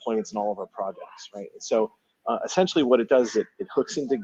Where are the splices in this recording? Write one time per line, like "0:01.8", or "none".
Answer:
none

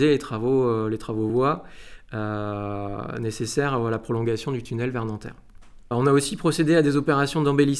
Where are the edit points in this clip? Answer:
none

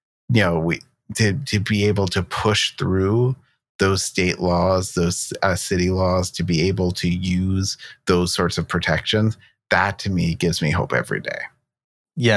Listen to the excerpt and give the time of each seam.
none

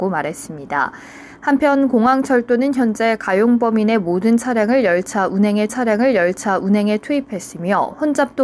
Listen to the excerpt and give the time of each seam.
0:05.7

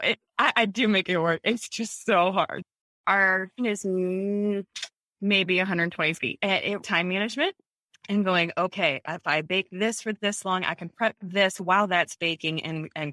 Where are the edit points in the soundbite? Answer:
0:03.6
0:06.2
0:06.8
0:07.9

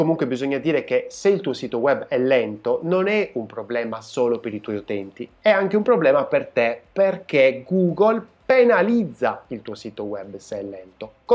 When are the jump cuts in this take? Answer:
none

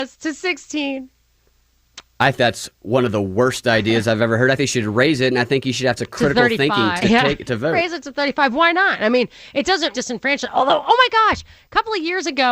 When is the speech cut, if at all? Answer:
0:02.3
0:04.6
0:06.0
0:07.0
0:09.9

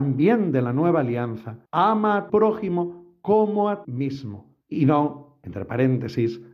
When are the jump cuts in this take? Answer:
0:01.7
0:02.3
0:03.8
0:04.6

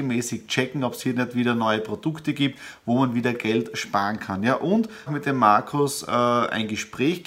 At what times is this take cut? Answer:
0:05.1

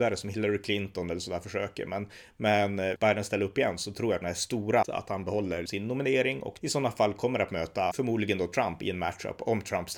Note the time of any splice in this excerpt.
0:03.0
0:04.2
0:04.8
0:05.7
0:06.6
0:07.9

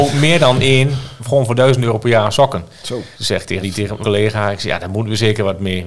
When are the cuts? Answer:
0:03.1
0:03.6
0:04.0

